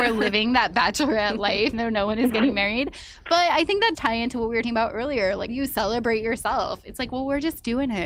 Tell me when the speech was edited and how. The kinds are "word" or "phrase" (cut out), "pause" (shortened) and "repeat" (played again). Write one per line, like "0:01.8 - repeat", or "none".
0:01.7 - word
0:03.9 - word
0:04.6 - word
0:05.5 - word

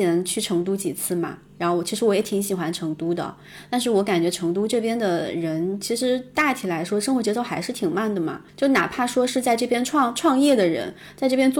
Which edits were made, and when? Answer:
0:08.5 - pause

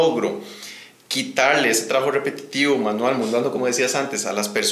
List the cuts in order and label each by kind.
none

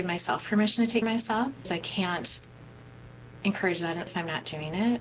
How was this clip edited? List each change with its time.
0:01.0 - word
0:01.6 - word
0:04.1 - word

